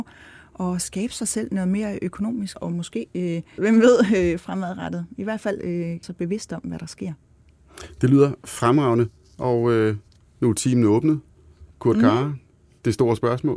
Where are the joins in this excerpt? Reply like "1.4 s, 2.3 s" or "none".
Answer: 2.5 s, 3.6 s, 6.0 s, 11.7 s